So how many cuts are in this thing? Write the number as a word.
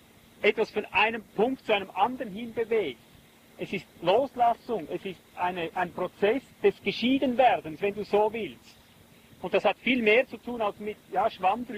two